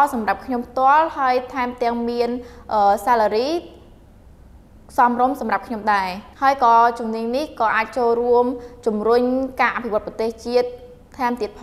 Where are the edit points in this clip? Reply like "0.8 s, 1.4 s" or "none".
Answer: 6.3 s